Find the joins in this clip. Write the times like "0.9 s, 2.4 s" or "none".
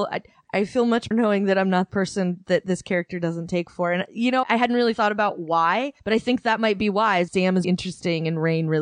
1.1 s, 1.9 s, 4.4 s, 6.0 s, 7.3 s, 7.6 s